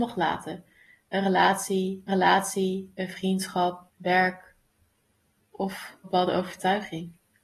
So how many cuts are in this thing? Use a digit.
3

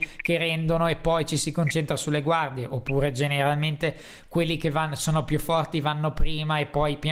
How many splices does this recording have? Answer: 0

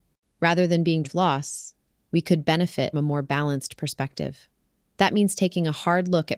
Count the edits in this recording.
3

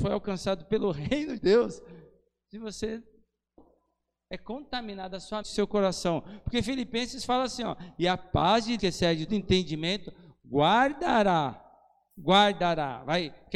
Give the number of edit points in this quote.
4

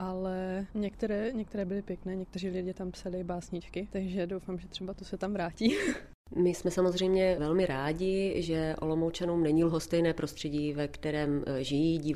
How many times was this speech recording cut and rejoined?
0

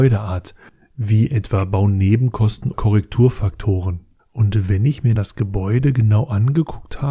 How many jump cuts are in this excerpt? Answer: 2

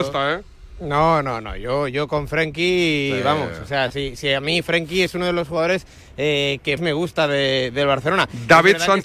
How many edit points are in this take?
1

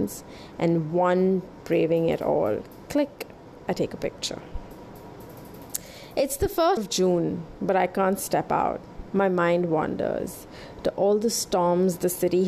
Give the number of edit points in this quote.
2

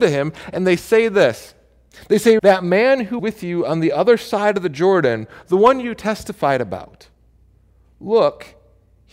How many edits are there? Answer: 2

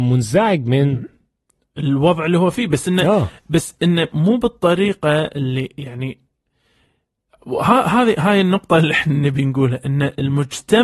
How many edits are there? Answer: 0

